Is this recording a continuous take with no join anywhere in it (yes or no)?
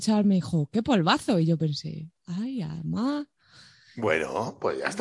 yes